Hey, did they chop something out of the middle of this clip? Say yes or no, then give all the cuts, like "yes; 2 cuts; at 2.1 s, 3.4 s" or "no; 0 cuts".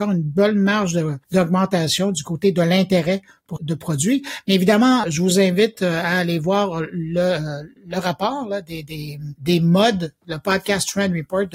yes; 3 cuts; at 3.6 s, 5.0 s, 7.8 s